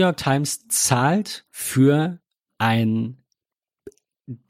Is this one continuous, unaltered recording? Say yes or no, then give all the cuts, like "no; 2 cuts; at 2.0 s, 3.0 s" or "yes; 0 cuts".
no; 1 cut; at 1.5 s